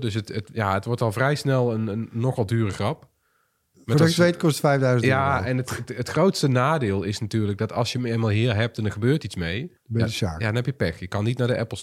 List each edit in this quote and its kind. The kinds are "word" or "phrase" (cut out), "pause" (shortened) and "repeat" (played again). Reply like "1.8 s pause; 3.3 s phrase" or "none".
9.8 s pause